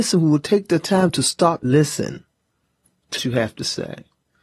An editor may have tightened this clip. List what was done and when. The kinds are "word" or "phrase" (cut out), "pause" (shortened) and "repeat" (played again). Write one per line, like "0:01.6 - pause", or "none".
0:01.6 - word
0:03.2 - word